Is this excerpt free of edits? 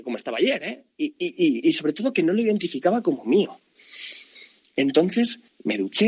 yes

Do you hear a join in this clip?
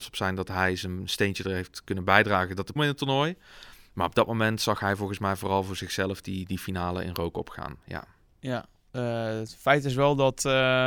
yes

